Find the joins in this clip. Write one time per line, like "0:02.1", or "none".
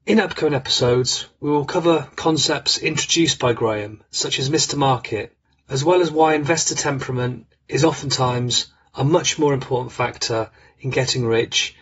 none